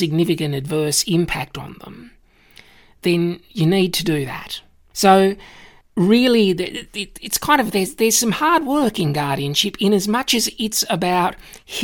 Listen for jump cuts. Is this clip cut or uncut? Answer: uncut